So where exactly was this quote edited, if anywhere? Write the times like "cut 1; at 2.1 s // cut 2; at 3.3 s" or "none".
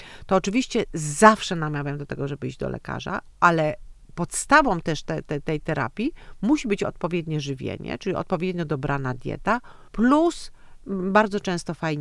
cut 1; at 9.9 s